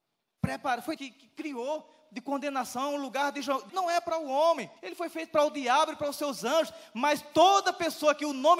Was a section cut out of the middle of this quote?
yes; 3 cuts; at 1.0 s, 3.7 s, 4.8 s

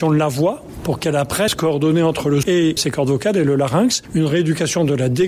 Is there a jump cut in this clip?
yes; 3 cuts; at 1.5 s, 2.4 s, 2.8 s

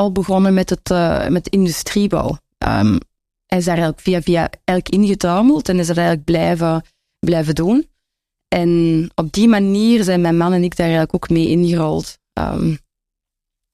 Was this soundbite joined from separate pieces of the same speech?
no; 0 cuts

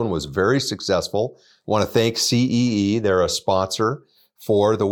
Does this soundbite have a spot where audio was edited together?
no; 0 cuts

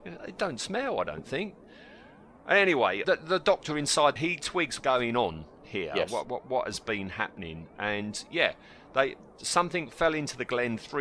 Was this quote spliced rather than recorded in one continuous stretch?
yes; 4 cuts; at 3.0 s, 4.2 s, 4.8 s, 6.2 s

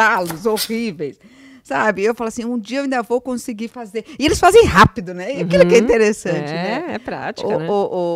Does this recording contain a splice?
no; 0 cuts

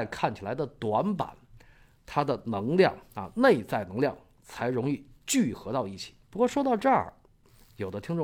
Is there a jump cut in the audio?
yes; 1 cut; at 6.2 s

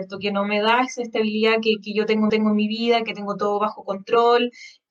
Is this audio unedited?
no; 1 cut; at 2.3 s

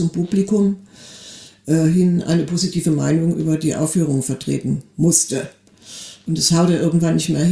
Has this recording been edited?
no; 0 cuts

